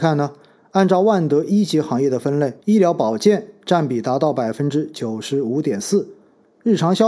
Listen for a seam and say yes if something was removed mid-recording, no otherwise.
yes